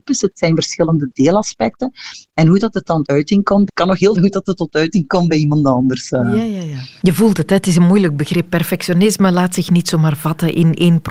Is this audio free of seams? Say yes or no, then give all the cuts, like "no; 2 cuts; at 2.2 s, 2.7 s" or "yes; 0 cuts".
no; 3 cuts; at 3.0 s, 3.7 s, 4.1 s